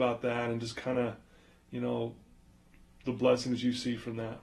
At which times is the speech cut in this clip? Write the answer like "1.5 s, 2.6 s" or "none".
none